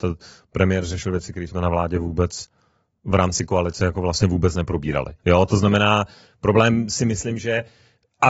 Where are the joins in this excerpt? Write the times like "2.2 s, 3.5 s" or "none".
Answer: 5.2 s